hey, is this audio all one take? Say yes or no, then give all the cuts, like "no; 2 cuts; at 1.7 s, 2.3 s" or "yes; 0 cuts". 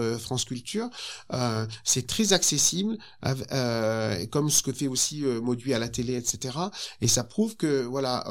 yes; 0 cuts